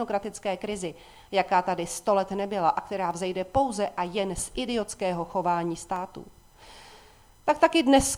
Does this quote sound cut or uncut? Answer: uncut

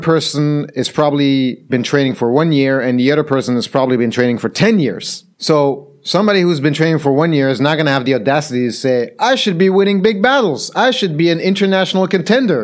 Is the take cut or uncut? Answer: cut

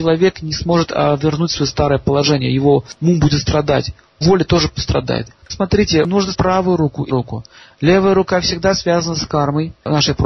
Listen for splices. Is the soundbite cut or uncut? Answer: cut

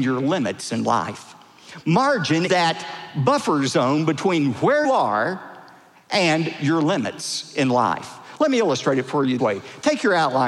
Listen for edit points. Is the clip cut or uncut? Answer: cut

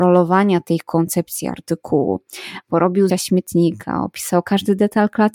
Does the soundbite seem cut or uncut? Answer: cut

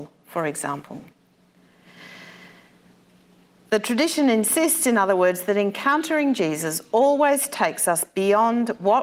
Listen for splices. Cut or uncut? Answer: uncut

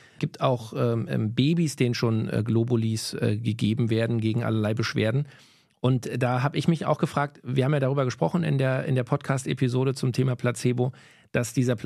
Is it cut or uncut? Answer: uncut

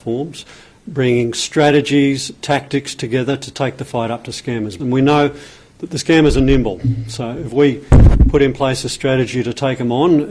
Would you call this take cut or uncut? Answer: uncut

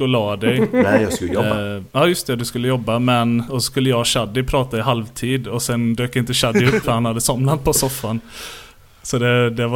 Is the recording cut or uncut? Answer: cut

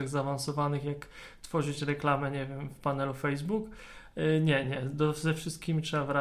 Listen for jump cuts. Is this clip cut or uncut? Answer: uncut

